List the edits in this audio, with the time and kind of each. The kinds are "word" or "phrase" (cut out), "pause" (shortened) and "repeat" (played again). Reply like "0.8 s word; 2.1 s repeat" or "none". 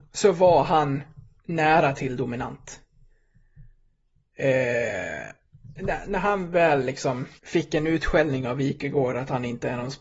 1.4 s pause; 7.4 s pause